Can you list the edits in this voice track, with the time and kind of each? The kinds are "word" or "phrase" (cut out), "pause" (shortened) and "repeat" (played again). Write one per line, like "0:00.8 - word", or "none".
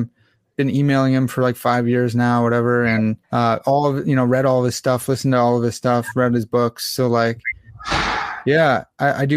0:03.2 - pause